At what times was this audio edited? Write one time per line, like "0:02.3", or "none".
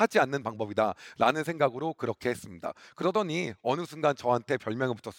none